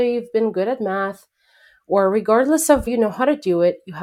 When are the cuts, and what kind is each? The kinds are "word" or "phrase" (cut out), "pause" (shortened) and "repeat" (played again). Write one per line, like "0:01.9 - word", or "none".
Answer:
0:02.9 - word